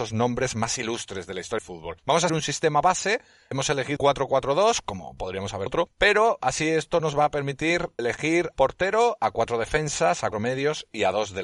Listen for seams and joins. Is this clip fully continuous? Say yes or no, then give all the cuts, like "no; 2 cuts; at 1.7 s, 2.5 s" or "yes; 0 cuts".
no; 9 cuts; at 1.6 s, 2.3 s, 3.5 s, 4.0 s, 5.2 s, 5.7 s, 8.0 s, 8.5 s, 10.3 s